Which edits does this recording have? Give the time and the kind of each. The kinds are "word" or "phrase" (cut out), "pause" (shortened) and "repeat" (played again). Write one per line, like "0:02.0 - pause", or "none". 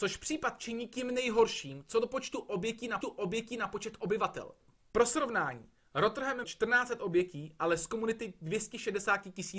0:03.0 - repeat
0:06.4 - word